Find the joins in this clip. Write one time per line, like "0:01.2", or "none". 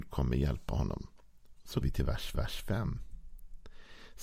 0:01.8
0:02.3